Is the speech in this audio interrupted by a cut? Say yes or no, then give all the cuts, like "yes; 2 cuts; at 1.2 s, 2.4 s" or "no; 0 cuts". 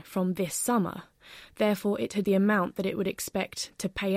yes; 1 cut; at 2.2 s